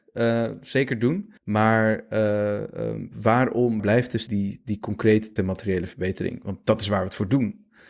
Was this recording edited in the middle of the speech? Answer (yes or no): yes